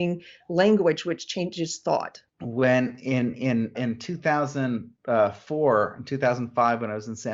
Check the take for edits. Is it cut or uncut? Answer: cut